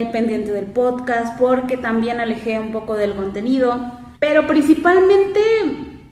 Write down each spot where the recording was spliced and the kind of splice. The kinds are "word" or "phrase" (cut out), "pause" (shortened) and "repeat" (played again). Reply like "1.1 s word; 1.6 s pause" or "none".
4.2 s pause